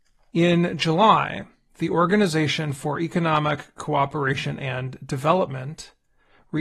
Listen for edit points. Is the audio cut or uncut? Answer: uncut